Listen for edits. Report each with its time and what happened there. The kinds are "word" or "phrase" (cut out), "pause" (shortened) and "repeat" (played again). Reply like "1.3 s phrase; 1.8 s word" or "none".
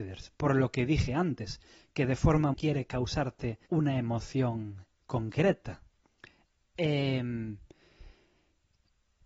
2.5 s phrase; 3.7 s pause